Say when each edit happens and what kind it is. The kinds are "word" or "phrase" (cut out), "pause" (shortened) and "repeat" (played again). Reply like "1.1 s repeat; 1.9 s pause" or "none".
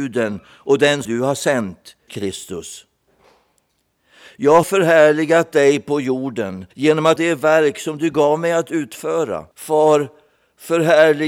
1.0 s word; 2.1 s word; 4.6 s word; 6.7 s pause; 7.2 s word; 9.5 s pause